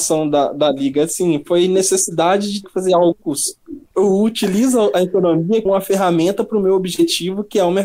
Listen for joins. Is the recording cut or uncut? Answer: cut